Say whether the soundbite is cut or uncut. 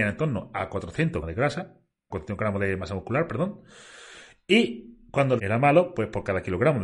cut